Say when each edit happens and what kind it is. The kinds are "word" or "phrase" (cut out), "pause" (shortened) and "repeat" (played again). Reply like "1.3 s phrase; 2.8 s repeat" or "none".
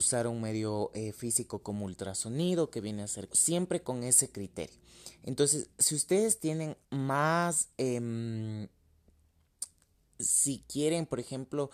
3.3 s phrase; 6.8 s pause